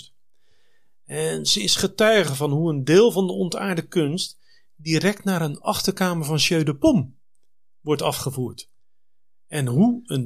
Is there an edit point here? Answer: no; 0 cuts

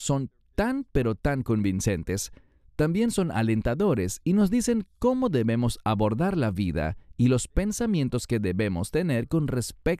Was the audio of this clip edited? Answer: no; 0 cuts

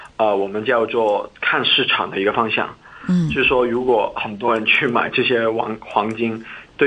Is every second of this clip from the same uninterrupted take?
yes; 0 cuts

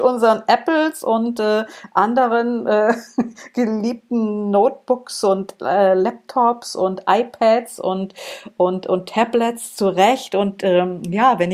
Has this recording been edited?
no; 0 cuts

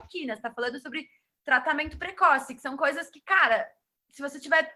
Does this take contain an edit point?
no; 0 cuts

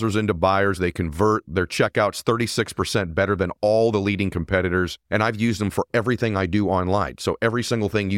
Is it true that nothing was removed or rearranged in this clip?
no; 1 cut; at 5.0 s

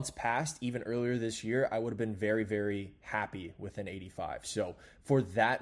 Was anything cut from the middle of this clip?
no; 0 cuts

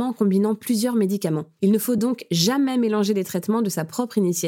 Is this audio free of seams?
yes; 0 cuts

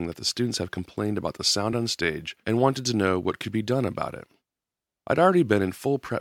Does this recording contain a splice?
no; 0 cuts

